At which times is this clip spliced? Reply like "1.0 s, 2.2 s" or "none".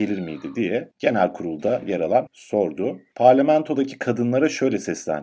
0.9 s, 2.3 s